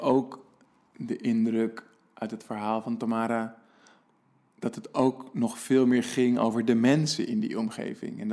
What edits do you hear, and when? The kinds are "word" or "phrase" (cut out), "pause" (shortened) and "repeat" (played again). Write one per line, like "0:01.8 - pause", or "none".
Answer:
none